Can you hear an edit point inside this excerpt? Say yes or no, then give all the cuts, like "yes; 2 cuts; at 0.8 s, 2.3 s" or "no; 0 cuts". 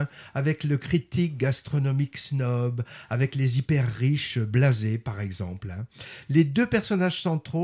no; 0 cuts